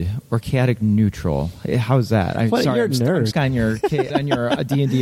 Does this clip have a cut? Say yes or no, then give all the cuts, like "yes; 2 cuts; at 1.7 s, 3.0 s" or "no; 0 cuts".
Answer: yes; 2 cuts; at 3.3 s, 4.1 s